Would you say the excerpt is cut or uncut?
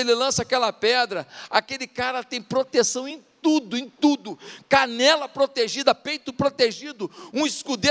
uncut